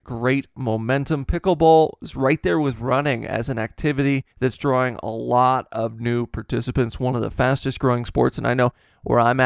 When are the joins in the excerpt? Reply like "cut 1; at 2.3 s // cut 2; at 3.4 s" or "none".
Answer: cut 1; at 4.3 s